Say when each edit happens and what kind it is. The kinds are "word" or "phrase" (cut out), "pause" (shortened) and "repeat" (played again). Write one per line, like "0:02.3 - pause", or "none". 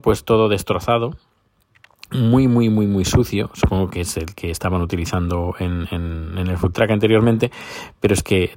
none